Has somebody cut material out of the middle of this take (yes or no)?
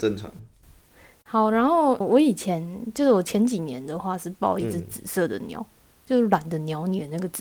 yes